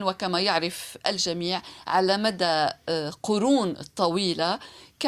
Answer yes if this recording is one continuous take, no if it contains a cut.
yes